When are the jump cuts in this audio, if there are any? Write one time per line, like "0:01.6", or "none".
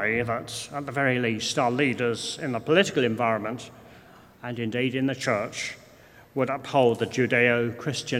none